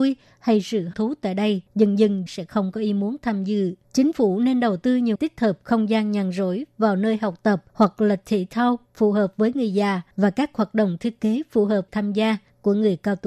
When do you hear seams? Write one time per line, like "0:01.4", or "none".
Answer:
0:00.9
0:01.7
0:02.3
0:03.8
0:05.1
0:07.7
0:10.1
0:11.9